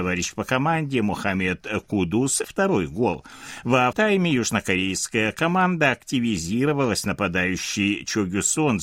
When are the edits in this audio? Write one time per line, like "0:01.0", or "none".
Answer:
0:02.4
0:03.9